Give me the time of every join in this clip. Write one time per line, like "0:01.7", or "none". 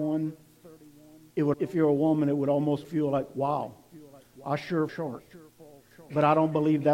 0:01.5
0:02.8
0:04.9